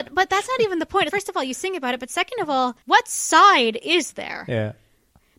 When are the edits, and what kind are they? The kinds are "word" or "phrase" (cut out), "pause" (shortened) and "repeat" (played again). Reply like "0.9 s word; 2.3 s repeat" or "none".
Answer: 1.1 s word; 2.8 s pause

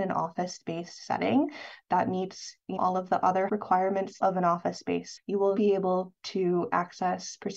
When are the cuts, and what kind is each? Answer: 2.8 s word; 3.5 s word; 4.2 s word; 5.2 s word; 5.6 s word

